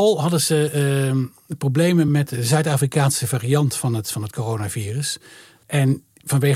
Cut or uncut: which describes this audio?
uncut